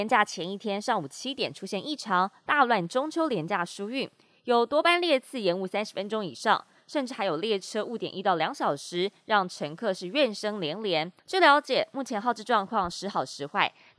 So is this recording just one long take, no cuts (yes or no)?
no